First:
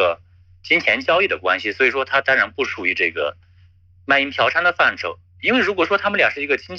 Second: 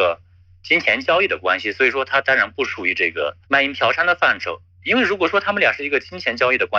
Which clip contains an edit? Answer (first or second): second